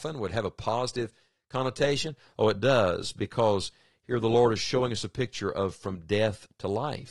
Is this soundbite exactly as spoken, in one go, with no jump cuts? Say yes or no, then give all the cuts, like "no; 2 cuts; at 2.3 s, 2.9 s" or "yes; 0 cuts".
yes; 0 cuts